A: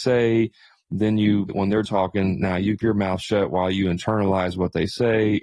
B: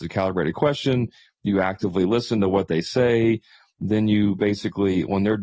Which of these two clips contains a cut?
A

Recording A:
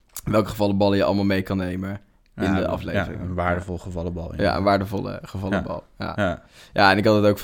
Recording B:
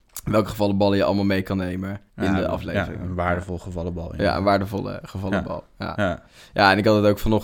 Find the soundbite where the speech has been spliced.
B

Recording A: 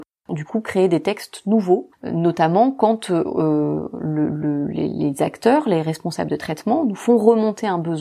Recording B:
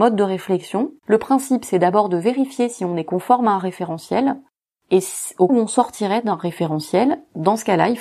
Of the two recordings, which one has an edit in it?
B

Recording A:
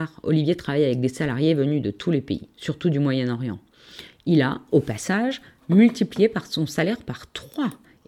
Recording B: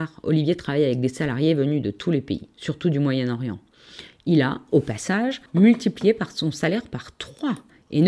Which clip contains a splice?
B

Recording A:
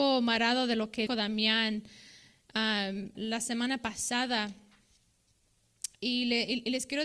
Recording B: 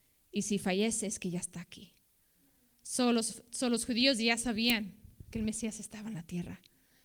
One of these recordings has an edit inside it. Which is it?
A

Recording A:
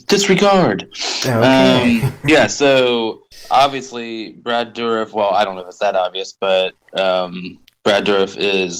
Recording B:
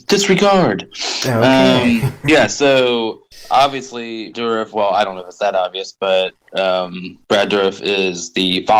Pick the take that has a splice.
B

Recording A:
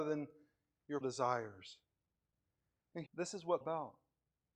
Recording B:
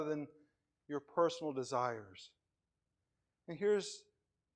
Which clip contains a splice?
A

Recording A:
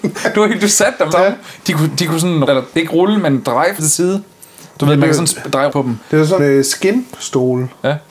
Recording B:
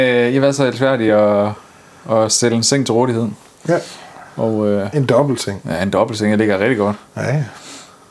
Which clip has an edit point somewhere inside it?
A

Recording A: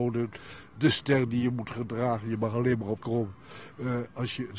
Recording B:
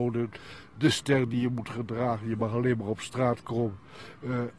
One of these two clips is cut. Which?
A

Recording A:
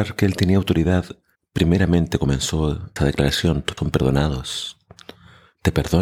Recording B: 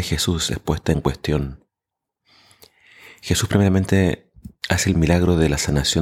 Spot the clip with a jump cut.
A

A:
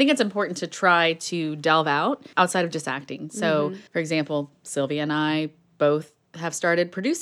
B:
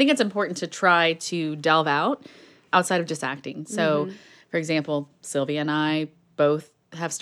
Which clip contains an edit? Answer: A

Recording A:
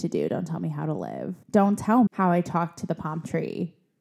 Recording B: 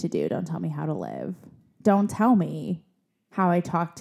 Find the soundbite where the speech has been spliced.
A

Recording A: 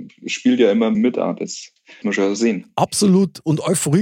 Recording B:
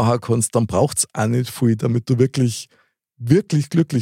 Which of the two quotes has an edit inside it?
A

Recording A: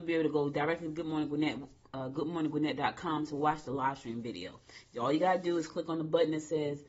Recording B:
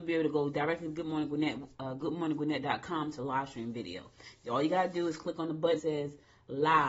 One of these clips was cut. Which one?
B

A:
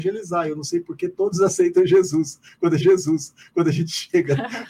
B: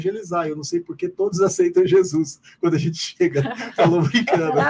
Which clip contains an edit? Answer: A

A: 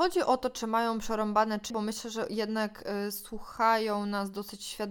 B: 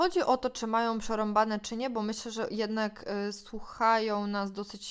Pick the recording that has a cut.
A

